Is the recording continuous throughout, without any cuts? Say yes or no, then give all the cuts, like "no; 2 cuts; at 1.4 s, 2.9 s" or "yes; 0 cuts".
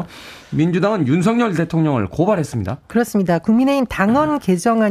yes; 0 cuts